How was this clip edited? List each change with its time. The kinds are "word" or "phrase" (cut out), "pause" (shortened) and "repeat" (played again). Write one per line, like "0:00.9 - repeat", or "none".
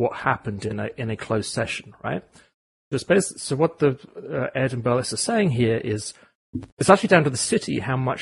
0:06.7 - pause